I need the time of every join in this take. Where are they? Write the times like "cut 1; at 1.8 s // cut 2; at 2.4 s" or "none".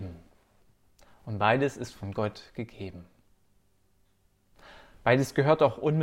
none